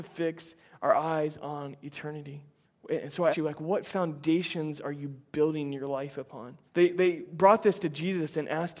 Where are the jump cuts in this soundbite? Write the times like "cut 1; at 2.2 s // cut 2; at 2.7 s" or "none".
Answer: cut 1; at 2.6 s // cut 2; at 3.3 s // cut 3; at 6.7 s